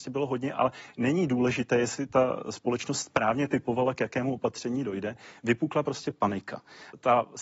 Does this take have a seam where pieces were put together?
no; 0 cuts

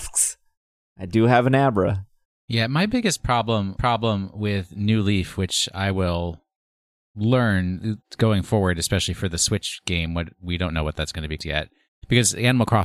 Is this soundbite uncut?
no; 2 cuts; at 3.8 s, 11.4 s

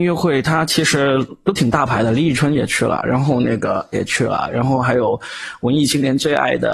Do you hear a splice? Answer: yes; 1 cut; at 3.9 s

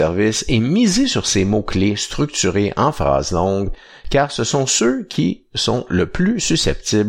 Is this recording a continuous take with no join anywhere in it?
yes; 0 cuts

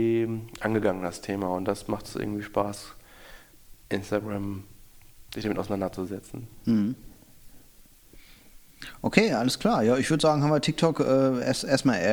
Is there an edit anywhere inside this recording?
yes; 1 cut; at 5.3 s

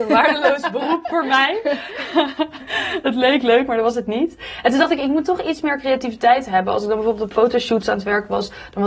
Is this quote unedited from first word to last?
yes; 0 cuts

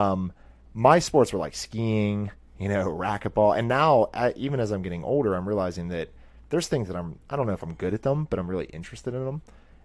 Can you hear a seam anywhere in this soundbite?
no; 0 cuts

